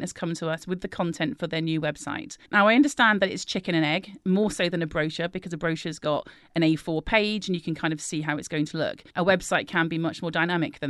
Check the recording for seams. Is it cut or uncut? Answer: cut